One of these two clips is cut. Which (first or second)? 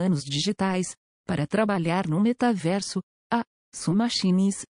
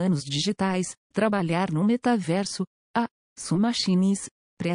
second